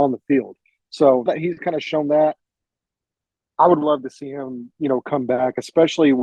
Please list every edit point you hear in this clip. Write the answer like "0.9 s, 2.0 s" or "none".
1.3 s, 3.8 s